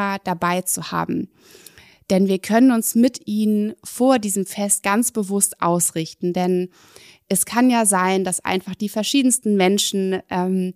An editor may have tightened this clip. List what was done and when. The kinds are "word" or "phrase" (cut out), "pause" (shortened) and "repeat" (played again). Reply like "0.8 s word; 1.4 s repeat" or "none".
none